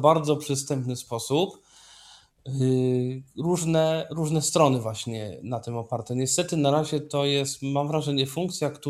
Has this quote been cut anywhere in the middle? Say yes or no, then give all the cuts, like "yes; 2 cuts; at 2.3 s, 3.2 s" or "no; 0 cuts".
no; 0 cuts